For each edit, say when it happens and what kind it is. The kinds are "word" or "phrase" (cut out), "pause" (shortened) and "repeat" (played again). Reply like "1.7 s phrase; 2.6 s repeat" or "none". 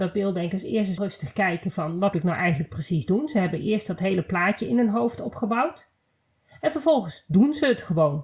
1.0 s word; 2.1 s word